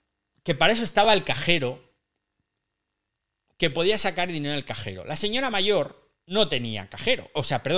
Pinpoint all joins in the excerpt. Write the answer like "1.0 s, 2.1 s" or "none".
none